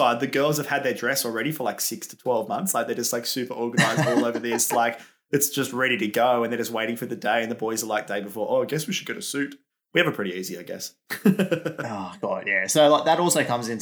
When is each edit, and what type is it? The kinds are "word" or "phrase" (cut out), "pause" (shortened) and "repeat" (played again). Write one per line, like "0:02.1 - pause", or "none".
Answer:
none